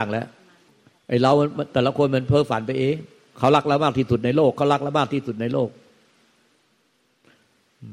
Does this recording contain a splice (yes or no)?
no